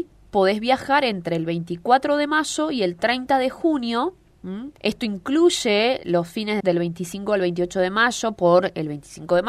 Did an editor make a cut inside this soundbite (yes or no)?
yes